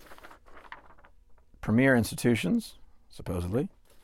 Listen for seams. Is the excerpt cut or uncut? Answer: uncut